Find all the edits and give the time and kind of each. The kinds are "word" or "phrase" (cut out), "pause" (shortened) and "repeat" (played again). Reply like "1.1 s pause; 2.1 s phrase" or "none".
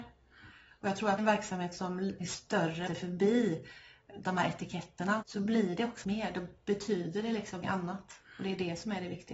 1.2 s phrase; 2.2 s word; 2.9 s phrase; 5.2 s word; 6.0 s word; 7.6 s word